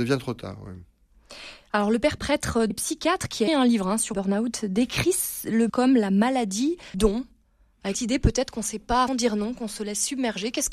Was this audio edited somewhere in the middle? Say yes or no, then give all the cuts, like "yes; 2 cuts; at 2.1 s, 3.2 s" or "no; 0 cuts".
yes; 8 cuts; at 2.2 s, 2.7 s, 3.5 s, 4.1 s, 5.7 s, 6.9 s, 7.9 s, 9.1 s